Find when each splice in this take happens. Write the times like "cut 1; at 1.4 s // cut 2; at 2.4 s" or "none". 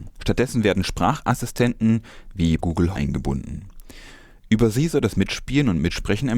cut 1; at 2.6 s // cut 2; at 2.9 s